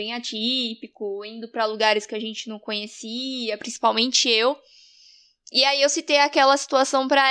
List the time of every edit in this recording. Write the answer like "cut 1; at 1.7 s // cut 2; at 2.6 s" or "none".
none